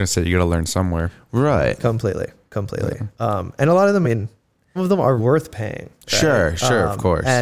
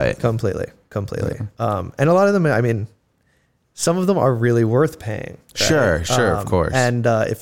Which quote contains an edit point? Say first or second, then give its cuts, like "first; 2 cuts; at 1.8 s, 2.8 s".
first; 3 cuts; at 4.0 s, 4.8 s, 5.2 s